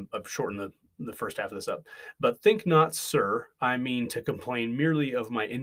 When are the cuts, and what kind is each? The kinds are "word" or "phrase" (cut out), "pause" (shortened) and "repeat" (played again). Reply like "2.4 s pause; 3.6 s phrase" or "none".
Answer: 3.5 s pause